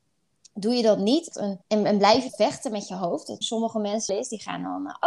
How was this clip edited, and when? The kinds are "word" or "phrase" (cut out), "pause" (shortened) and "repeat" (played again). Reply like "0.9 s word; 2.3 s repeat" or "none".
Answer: 1.3 s phrase; 1.6 s pause; 2.3 s word; 3.4 s word; 4.1 s word